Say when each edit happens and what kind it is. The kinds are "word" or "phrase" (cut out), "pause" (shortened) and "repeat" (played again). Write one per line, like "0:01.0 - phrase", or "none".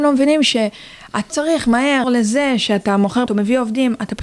0:01.3 - word
0:02.0 - word
0:03.3 - word